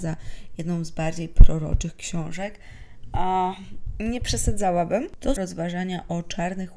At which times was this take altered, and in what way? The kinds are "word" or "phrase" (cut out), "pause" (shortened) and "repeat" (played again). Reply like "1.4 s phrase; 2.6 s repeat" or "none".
5.4 s phrase